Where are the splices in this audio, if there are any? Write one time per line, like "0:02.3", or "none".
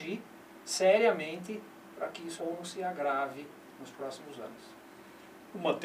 0:02.4